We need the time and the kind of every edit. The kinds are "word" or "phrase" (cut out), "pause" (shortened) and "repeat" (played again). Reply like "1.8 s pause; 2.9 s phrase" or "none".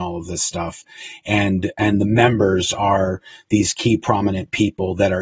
none